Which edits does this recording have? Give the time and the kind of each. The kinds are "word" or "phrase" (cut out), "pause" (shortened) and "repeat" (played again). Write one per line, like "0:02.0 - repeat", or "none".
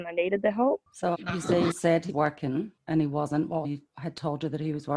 0:01.1 - word
0:01.7 - word
0:02.1 - word
0:03.6 - phrase

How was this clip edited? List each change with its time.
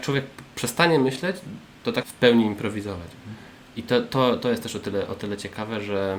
0:02.0 - phrase

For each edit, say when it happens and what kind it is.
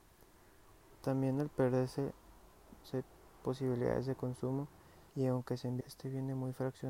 0:02.8 - word
0:03.4 - word
0:05.1 - pause
0:05.8 - phrase

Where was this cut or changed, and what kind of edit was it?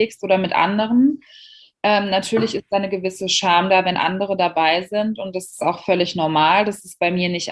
none

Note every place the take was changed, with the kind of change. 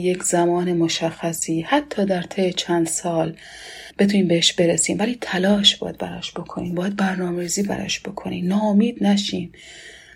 0:03.9 - pause

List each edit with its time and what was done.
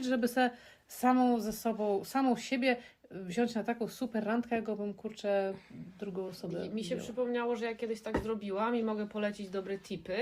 none

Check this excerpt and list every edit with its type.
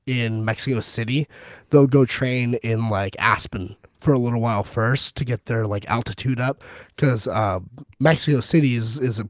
none

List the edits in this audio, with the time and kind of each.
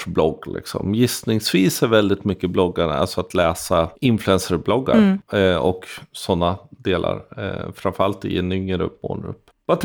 0:04.0 - pause

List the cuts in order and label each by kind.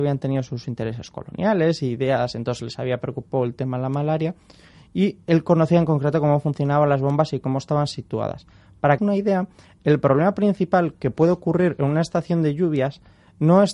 0:09.0 - phrase

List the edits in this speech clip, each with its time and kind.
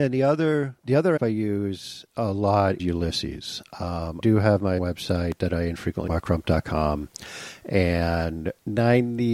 0:01.2 - word
0:02.8 - word
0:04.2 - word
0:04.8 - word
0:06.1 - word

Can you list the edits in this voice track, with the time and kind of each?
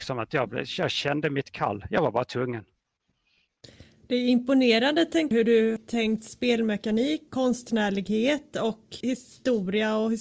0:05.3 - word
0:05.8 - word
0:07.3 - word
0:09.0 - word

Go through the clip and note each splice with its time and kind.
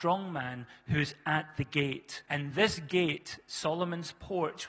0:02.3 - pause

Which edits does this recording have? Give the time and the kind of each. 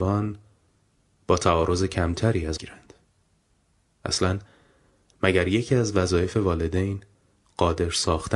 0:02.6 - phrase

